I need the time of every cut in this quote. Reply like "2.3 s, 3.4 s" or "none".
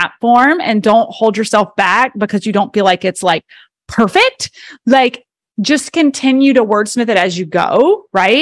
none